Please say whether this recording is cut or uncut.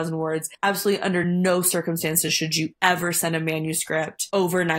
uncut